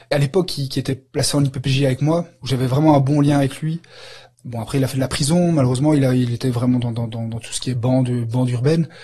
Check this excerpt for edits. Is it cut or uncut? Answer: uncut